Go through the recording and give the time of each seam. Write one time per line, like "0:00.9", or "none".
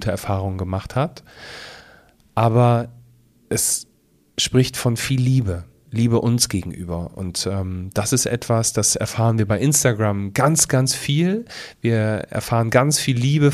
none